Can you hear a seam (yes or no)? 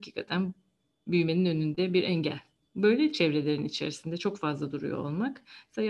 no